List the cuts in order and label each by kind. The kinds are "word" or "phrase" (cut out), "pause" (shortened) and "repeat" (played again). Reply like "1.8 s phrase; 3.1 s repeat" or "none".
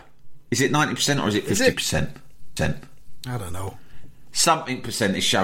2.6 s repeat